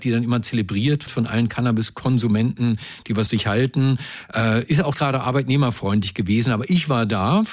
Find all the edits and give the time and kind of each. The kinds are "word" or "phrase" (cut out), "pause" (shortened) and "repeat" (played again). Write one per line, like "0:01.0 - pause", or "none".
0:01.1 - word
0:03.3 - word
0:04.9 - word